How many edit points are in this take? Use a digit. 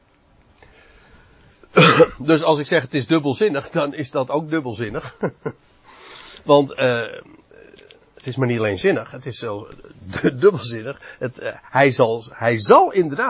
0